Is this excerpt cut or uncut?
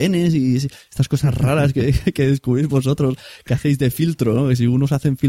uncut